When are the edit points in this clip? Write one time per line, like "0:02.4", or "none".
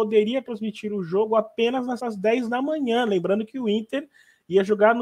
0:02.0